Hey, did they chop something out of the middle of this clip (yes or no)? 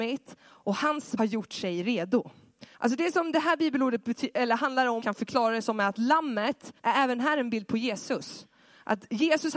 yes